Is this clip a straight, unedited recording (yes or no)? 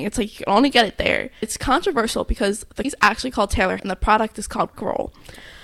no